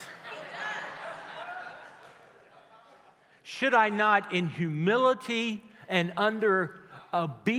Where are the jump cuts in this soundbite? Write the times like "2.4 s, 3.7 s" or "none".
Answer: none